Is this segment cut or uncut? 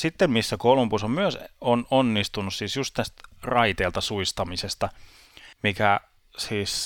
cut